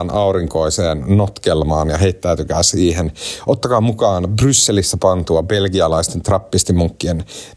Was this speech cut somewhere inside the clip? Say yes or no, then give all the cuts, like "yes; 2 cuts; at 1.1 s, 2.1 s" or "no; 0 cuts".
no; 0 cuts